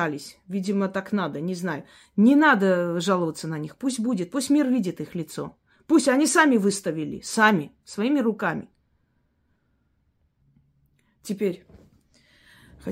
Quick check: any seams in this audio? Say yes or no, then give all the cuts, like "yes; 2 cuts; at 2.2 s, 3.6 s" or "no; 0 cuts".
no; 0 cuts